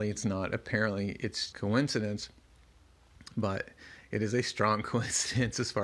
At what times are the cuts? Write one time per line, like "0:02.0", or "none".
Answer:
0:01.5